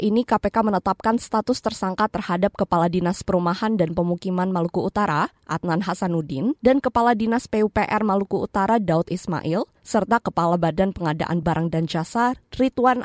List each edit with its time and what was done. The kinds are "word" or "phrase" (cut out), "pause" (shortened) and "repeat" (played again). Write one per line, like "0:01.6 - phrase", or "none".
none